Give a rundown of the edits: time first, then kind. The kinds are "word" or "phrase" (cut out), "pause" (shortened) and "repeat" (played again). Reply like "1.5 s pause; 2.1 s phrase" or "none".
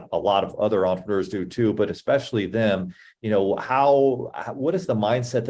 none